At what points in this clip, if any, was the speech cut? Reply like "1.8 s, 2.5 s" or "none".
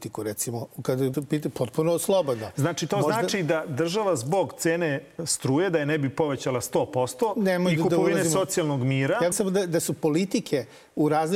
1.1 s, 9.3 s